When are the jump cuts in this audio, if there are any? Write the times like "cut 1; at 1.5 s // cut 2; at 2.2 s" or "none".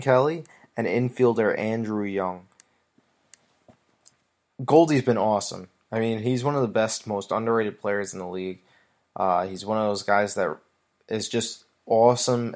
none

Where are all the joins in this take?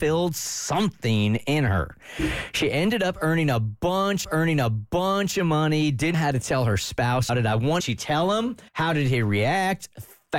cut 1; at 4.2 s // cut 2; at 6.1 s // cut 3; at 7.3 s // cut 4; at 7.8 s // cut 5; at 8.7 s

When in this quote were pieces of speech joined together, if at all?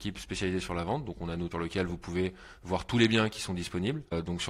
cut 1; at 1.5 s

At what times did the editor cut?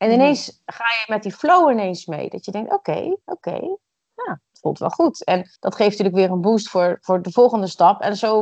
cut 1; at 3.2 s // cut 2; at 4.5 s // cut 3; at 5.6 s

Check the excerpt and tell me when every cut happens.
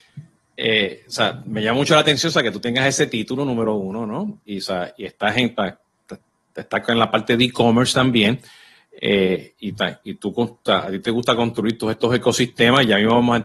none

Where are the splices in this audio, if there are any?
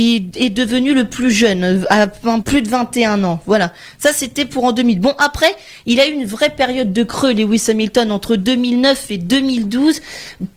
cut 1; at 2.4 s

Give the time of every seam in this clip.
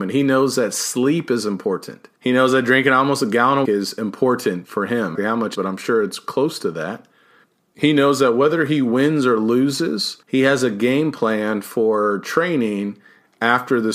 cut 1; at 2.2 s // cut 2; at 3.6 s // cut 3; at 5.1 s // cut 4; at 5.5 s // cut 5; at 7.4 s // cut 6; at 10.2 s

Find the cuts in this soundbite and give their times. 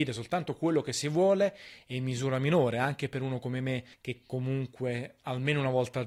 cut 1; at 3.9 s

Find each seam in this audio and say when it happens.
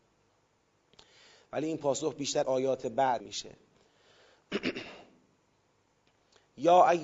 cut 1; at 2.4 s // cut 2; at 3.2 s

